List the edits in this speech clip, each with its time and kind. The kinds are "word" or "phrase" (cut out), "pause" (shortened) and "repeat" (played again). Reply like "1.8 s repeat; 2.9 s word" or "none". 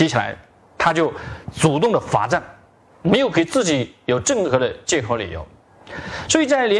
none